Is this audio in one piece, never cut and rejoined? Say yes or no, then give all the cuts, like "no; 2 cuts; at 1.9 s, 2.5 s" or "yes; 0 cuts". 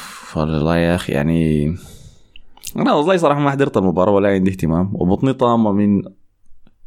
yes; 0 cuts